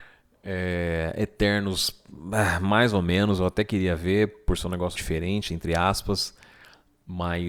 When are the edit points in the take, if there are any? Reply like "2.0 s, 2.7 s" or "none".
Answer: 5.0 s